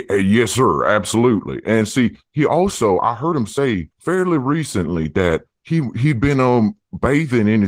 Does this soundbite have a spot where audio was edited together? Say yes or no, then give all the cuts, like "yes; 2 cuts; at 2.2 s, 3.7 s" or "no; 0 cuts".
yes; 1 cut; at 3.9 s